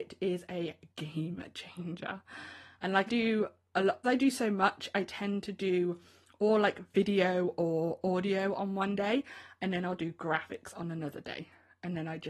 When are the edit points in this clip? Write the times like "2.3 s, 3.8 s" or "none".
0.9 s, 3.1 s, 4.0 s